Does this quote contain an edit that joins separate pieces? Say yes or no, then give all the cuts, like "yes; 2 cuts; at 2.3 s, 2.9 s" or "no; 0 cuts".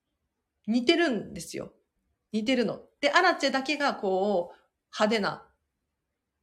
no; 0 cuts